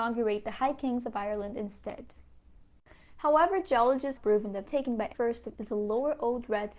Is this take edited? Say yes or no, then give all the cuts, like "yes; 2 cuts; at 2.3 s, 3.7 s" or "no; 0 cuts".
yes; 4 cuts; at 4.2 s, 4.7 s, 5.1 s, 5.5 s